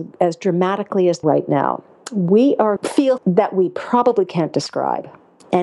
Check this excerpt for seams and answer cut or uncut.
cut